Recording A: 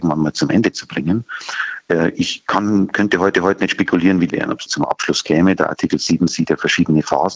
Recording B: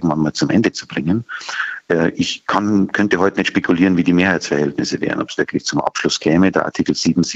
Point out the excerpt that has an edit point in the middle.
A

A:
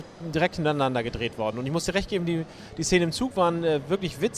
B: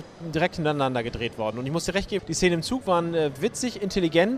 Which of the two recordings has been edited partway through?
B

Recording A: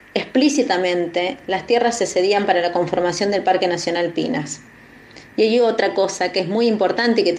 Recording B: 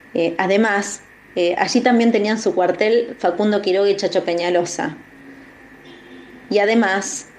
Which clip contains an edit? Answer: B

